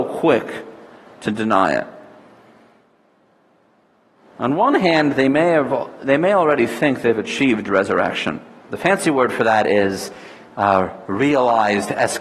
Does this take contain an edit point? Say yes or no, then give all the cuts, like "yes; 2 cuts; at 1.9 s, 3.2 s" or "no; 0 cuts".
yes; 1 cut; at 8.7 s